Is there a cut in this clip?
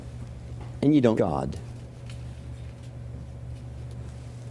yes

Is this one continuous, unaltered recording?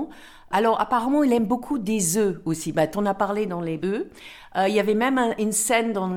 no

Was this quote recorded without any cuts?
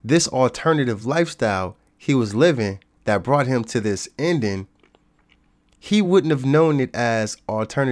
yes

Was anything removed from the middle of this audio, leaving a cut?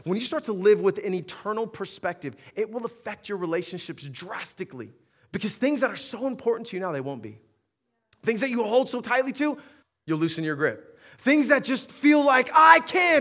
yes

